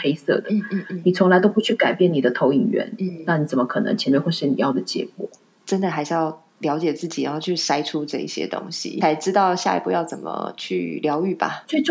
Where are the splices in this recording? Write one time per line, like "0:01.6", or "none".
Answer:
none